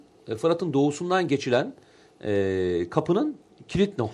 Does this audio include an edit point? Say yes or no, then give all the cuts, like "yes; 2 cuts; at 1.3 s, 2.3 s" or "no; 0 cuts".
no; 0 cuts